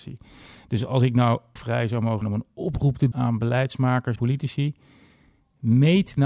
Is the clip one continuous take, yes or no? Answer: no